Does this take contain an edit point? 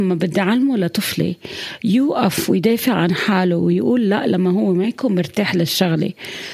no; 0 cuts

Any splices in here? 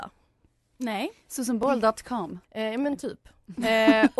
yes; 1 cut; at 2.4 s

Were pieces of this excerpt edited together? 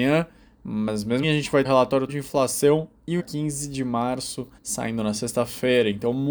yes; 5 cuts; at 1.2 s, 1.6 s, 2.1 s, 3.2 s, 4.6 s

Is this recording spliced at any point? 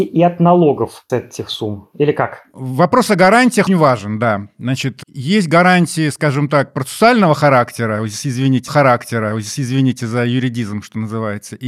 yes; 3 cuts; at 1.1 s, 3.7 s, 8.7 s

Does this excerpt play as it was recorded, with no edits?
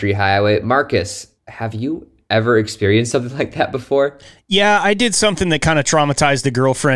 yes; 0 cuts

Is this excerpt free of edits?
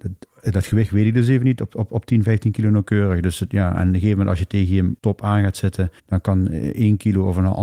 no; 2 cuts; at 5.0 s, 6.0 s

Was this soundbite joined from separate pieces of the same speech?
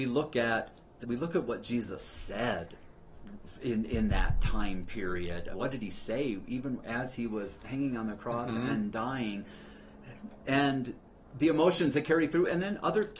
yes; 2 cuts; at 1.0 s, 5.5 s

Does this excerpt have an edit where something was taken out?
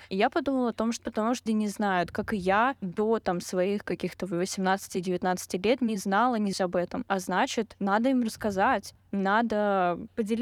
yes; 3 cuts; at 1.0 s, 1.5 s, 6.5 s

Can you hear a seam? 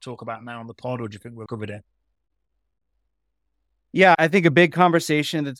yes; 1 cut; at 1.5 s

